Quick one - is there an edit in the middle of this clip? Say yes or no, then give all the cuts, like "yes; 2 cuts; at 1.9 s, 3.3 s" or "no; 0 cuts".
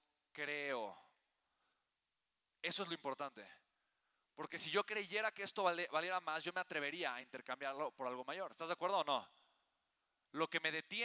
no; 0 cuts